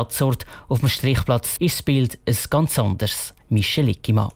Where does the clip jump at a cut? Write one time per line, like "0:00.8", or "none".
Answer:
0:01.6
0:03.4